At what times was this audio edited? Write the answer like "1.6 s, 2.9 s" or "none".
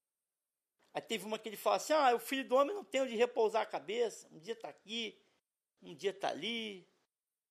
none